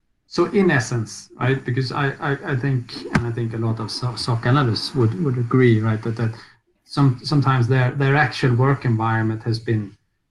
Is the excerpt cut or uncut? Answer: uncut